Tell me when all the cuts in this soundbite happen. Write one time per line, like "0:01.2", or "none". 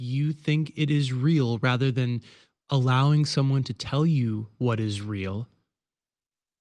none